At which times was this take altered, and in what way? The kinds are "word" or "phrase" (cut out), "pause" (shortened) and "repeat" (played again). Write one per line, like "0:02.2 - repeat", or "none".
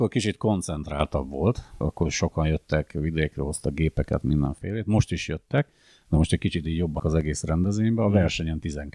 0:01.8 - word
0:07.0 - word